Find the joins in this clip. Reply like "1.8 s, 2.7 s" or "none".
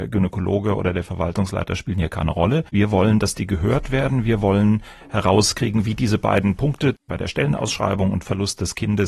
2.7 s, 7.0 s